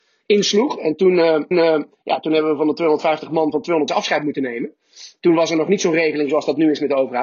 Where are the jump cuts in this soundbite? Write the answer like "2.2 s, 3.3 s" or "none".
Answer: 1.5 s, 3.9 s